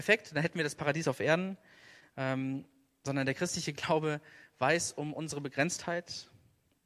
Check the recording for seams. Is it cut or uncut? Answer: uncut